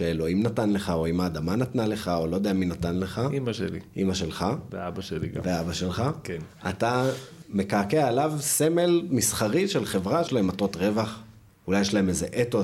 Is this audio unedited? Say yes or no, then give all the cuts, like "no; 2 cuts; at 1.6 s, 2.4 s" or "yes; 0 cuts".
no; 1 cut; at 10.3 s